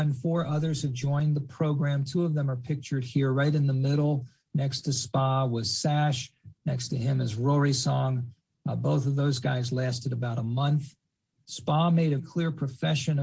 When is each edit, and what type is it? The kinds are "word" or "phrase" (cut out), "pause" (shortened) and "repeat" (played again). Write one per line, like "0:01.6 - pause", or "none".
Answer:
0:12.2 - word